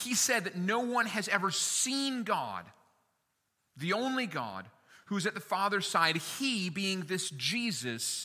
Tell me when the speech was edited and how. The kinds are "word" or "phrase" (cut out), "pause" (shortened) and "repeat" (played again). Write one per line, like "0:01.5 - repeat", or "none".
none